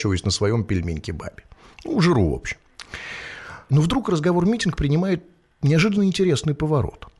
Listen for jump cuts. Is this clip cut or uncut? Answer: uncut